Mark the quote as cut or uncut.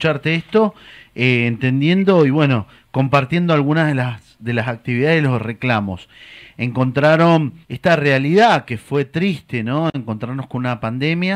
cut